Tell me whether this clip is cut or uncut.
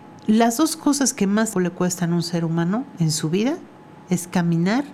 cut